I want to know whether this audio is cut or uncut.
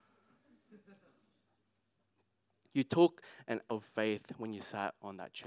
cut